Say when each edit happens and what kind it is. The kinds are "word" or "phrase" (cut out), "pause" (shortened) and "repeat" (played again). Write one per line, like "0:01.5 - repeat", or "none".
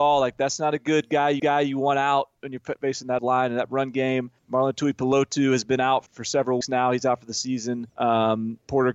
0:01.4 - repeat
0:03.2 - word
0:04.4 - pause
0:06.1 - word
0:06.6 - word
0:07.9 - pause